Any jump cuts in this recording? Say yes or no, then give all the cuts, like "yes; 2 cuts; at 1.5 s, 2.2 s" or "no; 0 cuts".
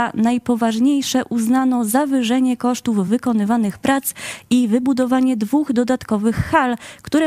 no; 0 cuts